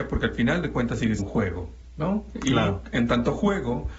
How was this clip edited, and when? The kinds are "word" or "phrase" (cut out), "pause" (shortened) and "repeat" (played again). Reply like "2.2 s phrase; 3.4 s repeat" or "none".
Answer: 1.2 s word